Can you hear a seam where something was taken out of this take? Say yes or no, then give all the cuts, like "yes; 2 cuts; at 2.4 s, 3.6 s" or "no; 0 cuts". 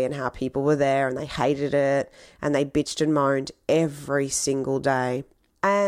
no; 0 cuts